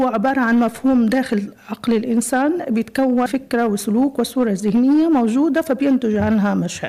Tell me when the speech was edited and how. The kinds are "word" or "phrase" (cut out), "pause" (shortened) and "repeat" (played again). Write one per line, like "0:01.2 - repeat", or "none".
0:03.3 - word